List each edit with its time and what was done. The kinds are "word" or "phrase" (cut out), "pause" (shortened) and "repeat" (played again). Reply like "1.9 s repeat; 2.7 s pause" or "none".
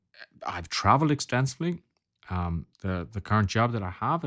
2.7 s pause